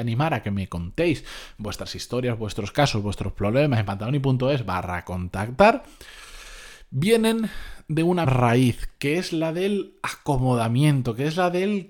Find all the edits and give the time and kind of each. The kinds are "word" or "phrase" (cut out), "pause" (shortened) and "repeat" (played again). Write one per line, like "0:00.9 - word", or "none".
0:08.2 - word